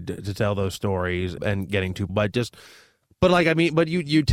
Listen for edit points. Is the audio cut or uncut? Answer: cut